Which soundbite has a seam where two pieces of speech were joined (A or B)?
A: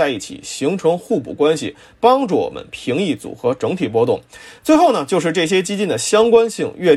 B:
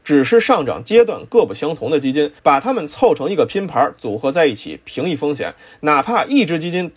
B